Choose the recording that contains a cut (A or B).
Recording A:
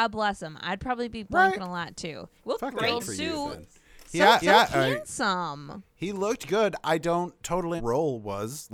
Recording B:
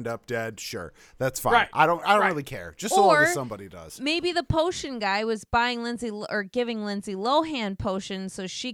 A